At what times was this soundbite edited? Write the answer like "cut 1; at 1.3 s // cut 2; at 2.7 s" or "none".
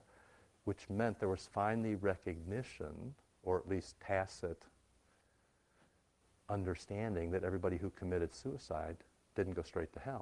none